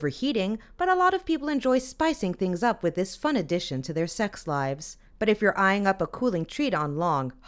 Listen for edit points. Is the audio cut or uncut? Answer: cut